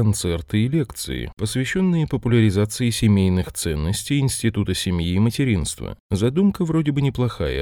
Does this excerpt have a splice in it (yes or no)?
no